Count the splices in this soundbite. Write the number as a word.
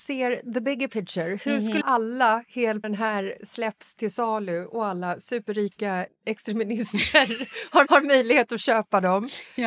four